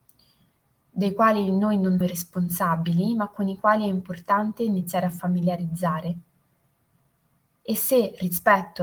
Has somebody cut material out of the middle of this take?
yes; 1 cut; at 2.0 s

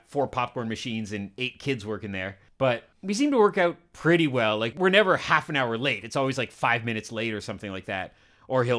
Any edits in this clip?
no; 0 cuts

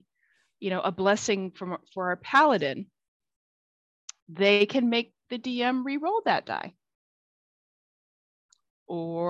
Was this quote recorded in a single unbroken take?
no; 1 cut; at 4.2 s

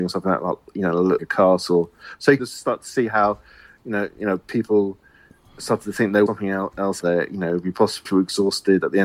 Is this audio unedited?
no; 5 cuts; at 1.2 s, 2.4 s, 6.3 s, 7.0 s, 8.1 s

